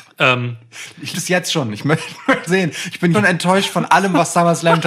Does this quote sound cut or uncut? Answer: cut